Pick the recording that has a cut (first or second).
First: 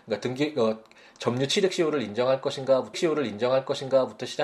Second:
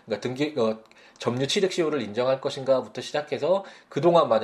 first